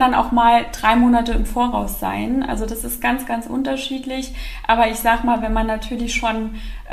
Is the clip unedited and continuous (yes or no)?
yes